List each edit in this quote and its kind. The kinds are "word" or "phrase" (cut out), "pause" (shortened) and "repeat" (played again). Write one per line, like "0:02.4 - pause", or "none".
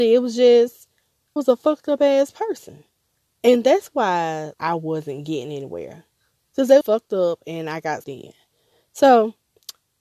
0:01.4 - word
0:04.5 - word
0:06.8 - word
0:08.0 - word